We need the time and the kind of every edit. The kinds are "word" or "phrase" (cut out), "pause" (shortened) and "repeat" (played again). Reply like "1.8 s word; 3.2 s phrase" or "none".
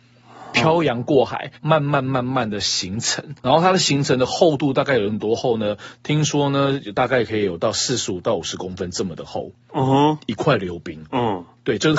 1.6 s pause; 3.4 s pause